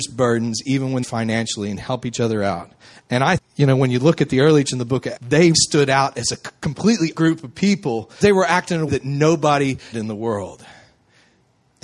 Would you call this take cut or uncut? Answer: cut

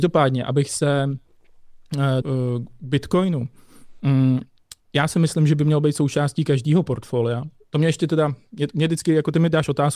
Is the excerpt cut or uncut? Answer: cut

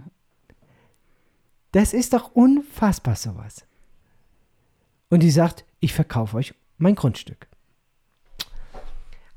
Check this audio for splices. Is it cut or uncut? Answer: uncut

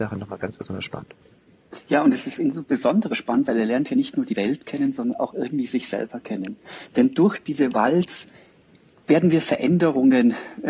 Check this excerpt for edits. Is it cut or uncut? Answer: uncut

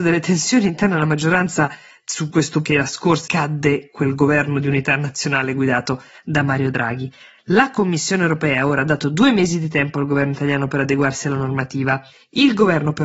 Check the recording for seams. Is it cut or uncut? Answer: cut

